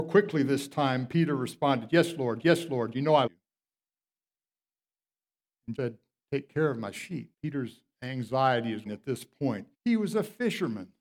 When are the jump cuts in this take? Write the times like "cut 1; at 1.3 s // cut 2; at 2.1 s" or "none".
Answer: cut 1; at 2.4 s // cut 2; at 3.3 s // cut 3; at 5.7 s // cut 4; at 7.3 s // cut 5; at 8.9 s // cut 6; at 9.7 s